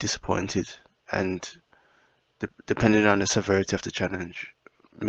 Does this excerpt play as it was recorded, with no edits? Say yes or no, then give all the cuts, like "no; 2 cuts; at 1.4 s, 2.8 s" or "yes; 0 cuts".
yes; 0 cuts